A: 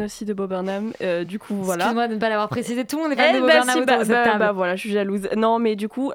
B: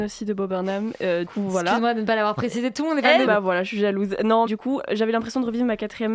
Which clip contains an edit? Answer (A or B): B